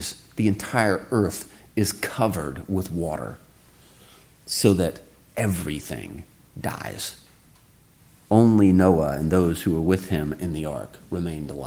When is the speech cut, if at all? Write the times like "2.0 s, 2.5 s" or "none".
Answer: none

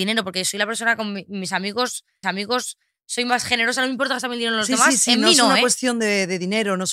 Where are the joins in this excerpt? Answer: 2.2 s

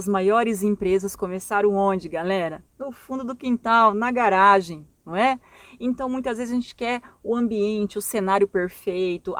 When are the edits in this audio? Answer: 2.7 s

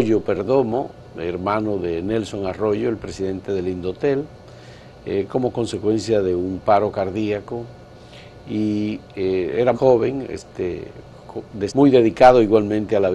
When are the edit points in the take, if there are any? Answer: 9.7 s, 11.7 s

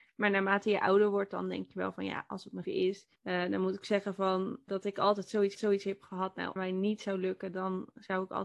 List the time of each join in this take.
2.6 s, 3.2 s, 4.7 s, 5.5 s, 6.6 s

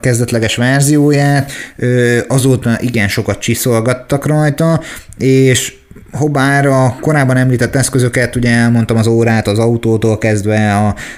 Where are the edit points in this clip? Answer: none

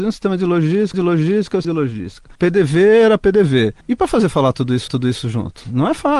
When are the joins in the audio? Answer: 0.9 s, 1.6 s, 2.3 s, 3.8 s, 4.9 s

